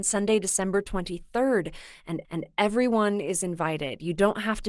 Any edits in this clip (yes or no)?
yes